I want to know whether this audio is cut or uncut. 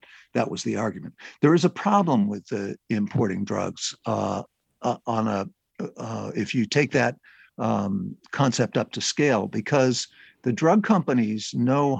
uncut